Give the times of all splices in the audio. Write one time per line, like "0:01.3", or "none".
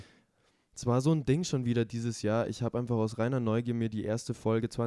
none